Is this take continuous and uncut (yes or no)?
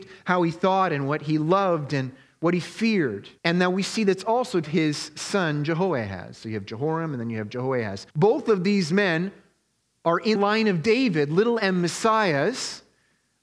no